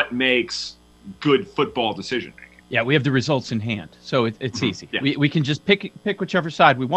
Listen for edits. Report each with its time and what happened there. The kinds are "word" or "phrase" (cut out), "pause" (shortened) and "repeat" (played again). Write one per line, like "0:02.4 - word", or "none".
0:02.6 - pause

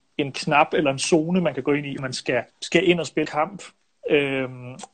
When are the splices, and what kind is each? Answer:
0:02.0 - word
0:02.5 - pause
0:03.2 - word

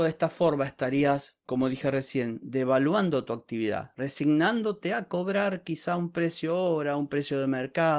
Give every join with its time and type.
none

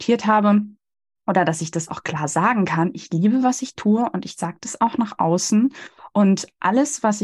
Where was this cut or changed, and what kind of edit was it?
none

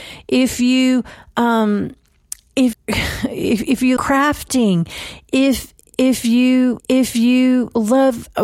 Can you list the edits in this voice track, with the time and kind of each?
0:02.7 - word
0:04.0 - word
0:06.8 - repeat

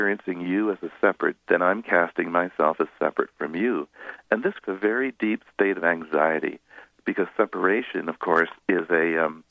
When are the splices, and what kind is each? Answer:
0:01.4 - word
0:04.6 - word

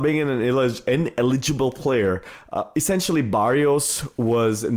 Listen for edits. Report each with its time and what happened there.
none

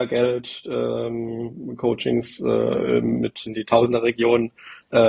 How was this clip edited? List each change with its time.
0:03.5 - word

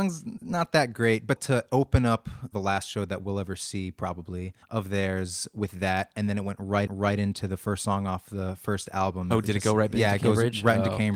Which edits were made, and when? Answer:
0:01.4 - word
0:02.5 - word
0:04.6 - pause
0:06.9 - repeat

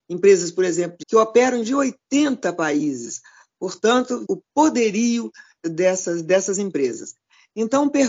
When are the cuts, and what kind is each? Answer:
0:01.0 - word
0:01.6 - word
0:04.2 - word
0:05.6 - word

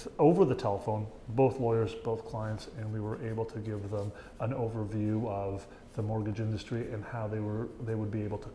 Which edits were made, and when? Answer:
none

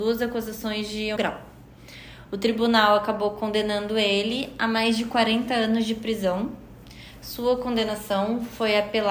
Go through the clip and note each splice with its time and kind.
0:01.2 - phrase

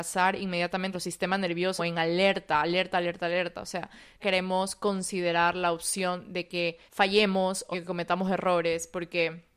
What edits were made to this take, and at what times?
0:00.9 - word
0:01.8 - phrase
0:04.2 - phrase
0:06.9 - pause
0:07.7 - word

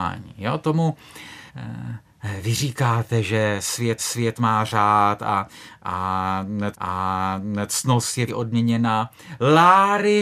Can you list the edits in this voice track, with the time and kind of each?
0:01.5 - pause
0:04.0 - repeat
0:06.7 - repeat
0:08.3 - word

